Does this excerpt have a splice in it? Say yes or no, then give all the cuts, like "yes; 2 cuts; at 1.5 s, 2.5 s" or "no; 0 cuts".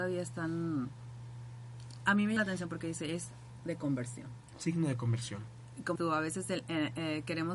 yes; 3 cuts; at 2.4 s, 3.6 s, 6.0 s